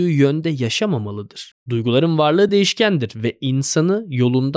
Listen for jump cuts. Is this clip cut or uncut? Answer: uncut